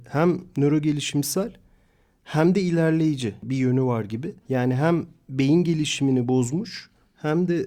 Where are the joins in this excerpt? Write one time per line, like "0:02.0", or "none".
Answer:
0:04.4